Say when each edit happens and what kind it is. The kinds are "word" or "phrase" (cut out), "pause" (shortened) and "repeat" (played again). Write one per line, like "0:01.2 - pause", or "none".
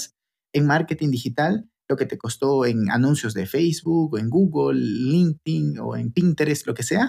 none